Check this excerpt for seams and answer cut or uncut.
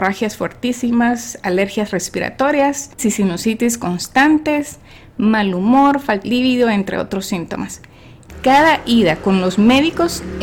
cut